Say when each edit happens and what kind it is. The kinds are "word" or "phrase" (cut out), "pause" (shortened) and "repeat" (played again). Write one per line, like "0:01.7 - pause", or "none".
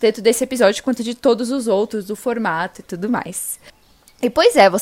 none